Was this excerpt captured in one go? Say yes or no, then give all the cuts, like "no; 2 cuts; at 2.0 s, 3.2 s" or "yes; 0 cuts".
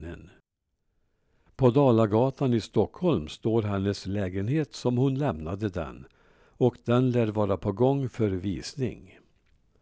yes; 0 cuts